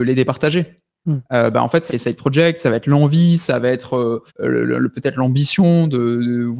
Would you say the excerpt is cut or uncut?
cut